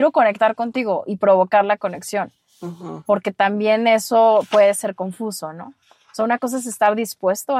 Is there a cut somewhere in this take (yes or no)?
no